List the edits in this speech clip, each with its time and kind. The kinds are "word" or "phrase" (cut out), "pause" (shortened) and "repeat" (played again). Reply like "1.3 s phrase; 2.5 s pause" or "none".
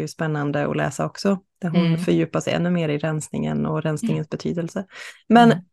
1.5 s pause